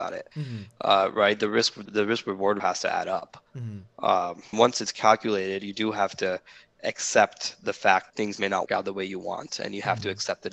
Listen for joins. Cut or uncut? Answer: cut